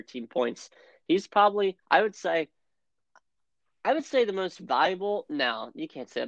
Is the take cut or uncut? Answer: cut